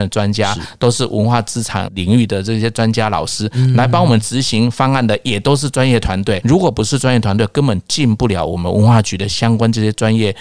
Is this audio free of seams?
no; 1 cut; at 6.4 s

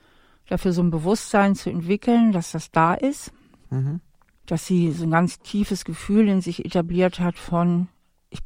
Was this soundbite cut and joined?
no; 0 cuts

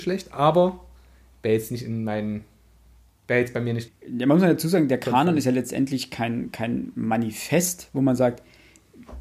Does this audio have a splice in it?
no; 0 cuts

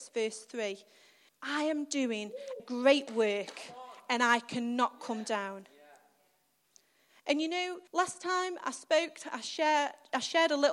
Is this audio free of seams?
no; 3 cuts; at 1.3 s, 2.6 s, 7.9 s

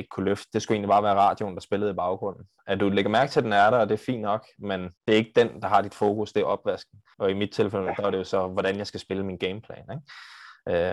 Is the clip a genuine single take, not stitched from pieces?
no; 2 cuts; at 5.0 s, 7.1 s

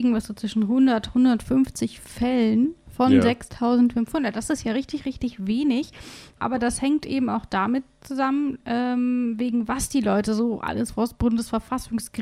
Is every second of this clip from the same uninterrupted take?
yes; 0 cuts

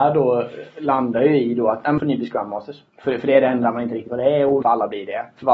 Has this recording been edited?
yes; 4 cuts; at 2.0 s, 2.9 s, 4.1 s, 4.6 s

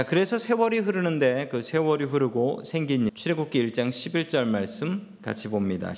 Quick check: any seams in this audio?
yes; 1 cut; at 3.1 s

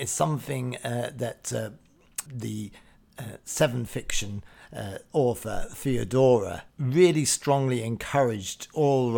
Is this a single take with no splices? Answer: no; 3 cuts; at 2.3 s, 3.9 s, 6.7 s

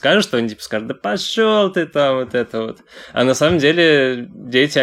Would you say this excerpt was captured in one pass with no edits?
yes; 0 cuts

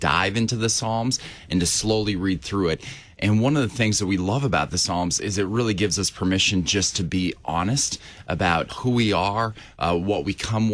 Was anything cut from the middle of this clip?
yes; 1 cut; at 8.7 s

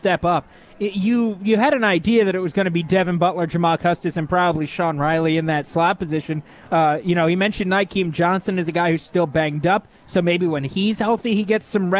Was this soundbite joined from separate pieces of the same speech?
no; 0 cuts

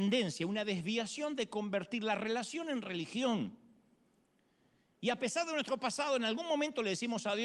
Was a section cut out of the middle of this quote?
no; 0 cuts

